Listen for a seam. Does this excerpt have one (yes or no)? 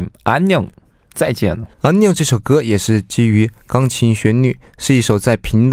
yes